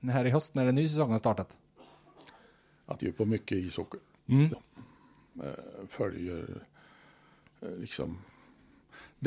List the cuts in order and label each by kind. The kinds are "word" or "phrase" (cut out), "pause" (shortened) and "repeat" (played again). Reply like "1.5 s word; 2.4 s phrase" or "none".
3.0 s word; 4.5 s word

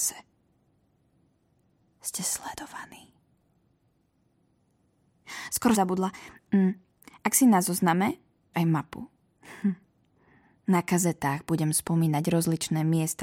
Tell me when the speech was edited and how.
5.7 s word; 8.5 s word

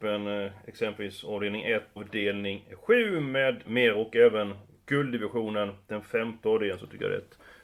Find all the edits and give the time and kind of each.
2.0 s word; 3.6 s word

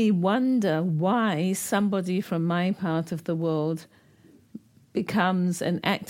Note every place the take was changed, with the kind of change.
none

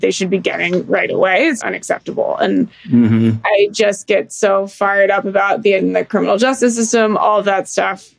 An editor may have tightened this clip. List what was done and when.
1.6 s word; 5.8 s phrase

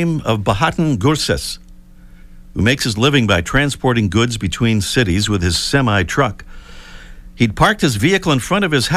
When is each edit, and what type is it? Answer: none

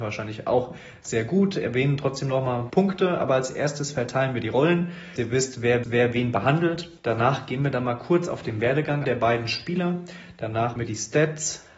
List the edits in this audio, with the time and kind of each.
2.7 s word; 5.2 s word; 5.8 s repeat; 7.0 s pause; 9.0 s word; 10.8 s word

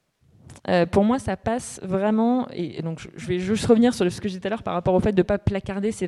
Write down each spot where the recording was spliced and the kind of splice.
none

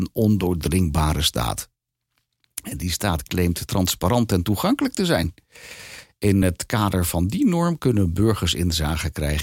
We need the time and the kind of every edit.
none

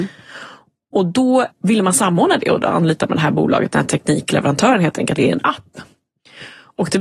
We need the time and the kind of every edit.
1.5 s word; 5.2 s phrase

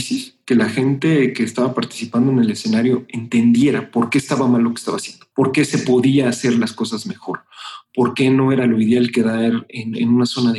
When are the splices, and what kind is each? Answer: 5.3 s pause

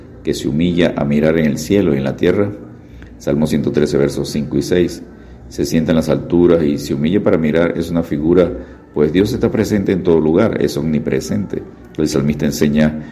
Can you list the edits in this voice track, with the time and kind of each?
none

